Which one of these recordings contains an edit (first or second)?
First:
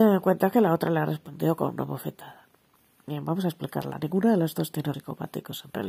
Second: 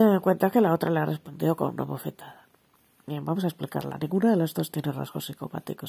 first